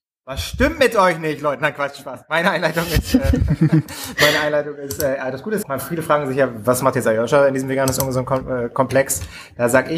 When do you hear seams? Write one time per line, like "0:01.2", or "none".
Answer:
0:05.6